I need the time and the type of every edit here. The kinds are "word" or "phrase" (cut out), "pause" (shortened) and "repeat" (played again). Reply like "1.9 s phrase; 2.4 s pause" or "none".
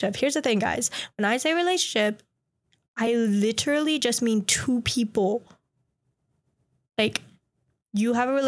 none